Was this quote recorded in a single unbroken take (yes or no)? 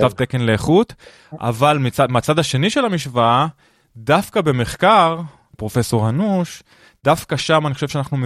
no